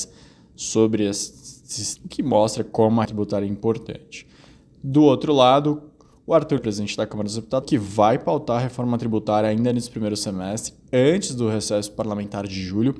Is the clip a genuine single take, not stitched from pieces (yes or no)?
no